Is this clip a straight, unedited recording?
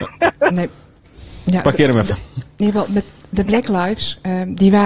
yes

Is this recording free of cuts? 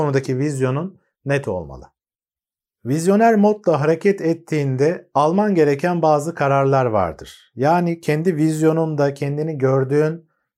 yes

